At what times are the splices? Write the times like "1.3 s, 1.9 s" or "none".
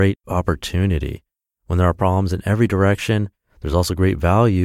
none